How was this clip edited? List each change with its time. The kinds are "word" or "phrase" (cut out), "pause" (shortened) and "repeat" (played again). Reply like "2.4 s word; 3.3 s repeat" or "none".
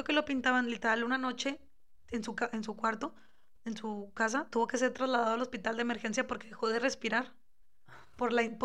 none